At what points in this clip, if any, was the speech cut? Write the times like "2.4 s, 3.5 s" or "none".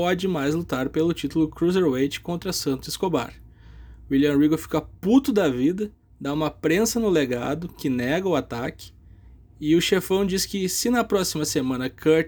6.0 s